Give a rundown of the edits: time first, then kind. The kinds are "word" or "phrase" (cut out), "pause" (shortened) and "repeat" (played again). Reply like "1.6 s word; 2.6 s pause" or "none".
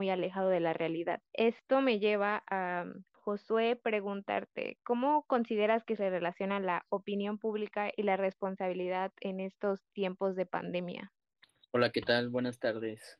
none